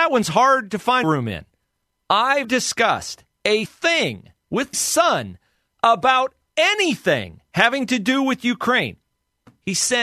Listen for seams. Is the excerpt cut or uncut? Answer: cut